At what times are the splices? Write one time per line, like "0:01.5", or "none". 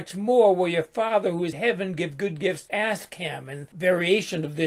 0:01.5
0:02.7
0:03.7